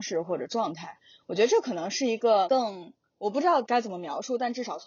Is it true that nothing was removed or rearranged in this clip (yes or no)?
yes